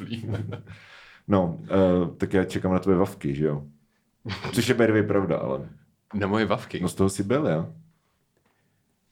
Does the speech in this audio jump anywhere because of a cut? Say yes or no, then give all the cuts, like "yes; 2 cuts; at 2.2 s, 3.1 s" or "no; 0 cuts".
no; 0 cuts